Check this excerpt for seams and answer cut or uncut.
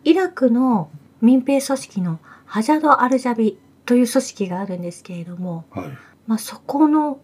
uncut